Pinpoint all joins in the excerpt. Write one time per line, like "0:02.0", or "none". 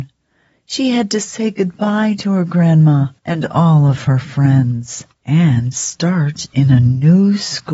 0:03.2